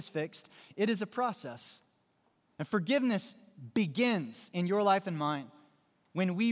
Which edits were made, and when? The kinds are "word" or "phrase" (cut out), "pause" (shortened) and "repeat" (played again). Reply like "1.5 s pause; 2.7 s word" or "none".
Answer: none